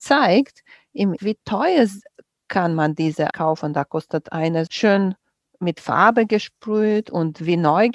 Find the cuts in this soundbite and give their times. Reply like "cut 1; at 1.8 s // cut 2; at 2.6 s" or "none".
cut 1; at 1.2 s // cut 2; at 3.3 s // cut 3; at 4.7 s